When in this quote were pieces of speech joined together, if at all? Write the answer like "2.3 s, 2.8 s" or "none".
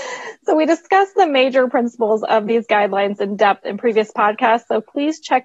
none